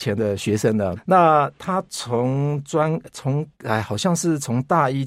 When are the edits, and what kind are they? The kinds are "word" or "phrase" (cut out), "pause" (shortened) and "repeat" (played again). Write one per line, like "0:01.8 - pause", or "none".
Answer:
0:01.0 - phrase
0:03.5 - pause